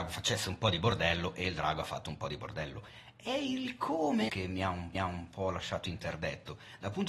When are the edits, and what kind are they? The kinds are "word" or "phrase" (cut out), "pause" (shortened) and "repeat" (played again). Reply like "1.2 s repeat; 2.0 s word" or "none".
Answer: 4.3 s word; 4.9 s repeat